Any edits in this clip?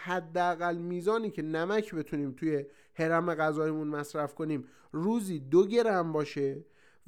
no; 0 cuts

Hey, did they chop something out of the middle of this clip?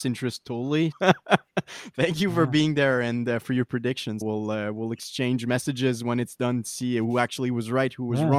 yes; 2 cuts; at 0.9 s, 4.2 s

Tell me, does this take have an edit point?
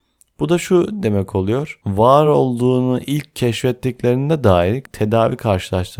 no; 0 cuts

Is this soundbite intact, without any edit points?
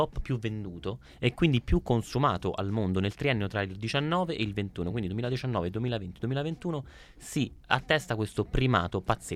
yes; 0 cuts

